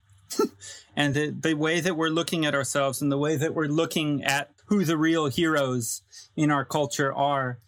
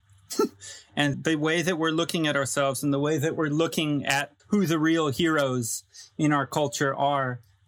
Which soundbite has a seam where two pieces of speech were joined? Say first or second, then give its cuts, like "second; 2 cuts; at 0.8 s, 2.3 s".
second; 1 cut; at 1.1 s